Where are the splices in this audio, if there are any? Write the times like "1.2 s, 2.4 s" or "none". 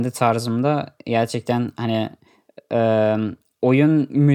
none